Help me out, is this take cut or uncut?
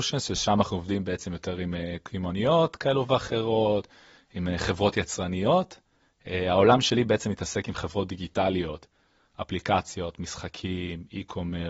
uncut